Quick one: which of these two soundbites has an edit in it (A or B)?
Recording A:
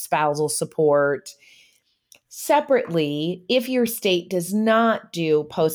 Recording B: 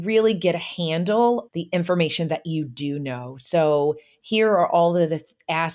B